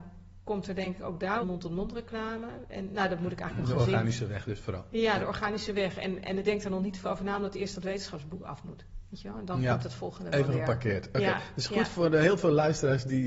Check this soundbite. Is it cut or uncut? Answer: cut